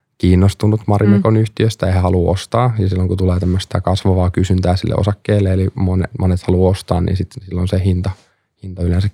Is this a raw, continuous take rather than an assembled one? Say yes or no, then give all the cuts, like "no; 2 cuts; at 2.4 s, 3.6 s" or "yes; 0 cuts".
yes; 0 cuts